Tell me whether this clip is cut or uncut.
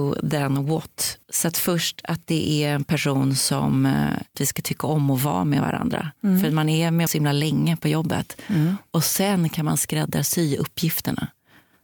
cut